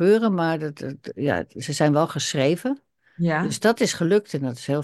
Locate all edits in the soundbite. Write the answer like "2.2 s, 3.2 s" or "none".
none